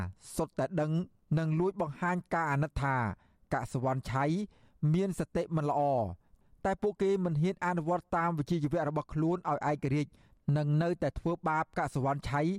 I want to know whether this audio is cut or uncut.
uncut